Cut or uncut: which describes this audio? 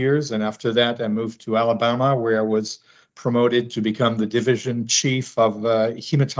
uncut